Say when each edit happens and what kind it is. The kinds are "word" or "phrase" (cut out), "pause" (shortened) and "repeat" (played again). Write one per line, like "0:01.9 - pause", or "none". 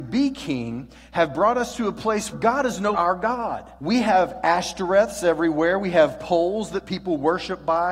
0:02.3 - word
0:02.9 - word
0:03.8 - pause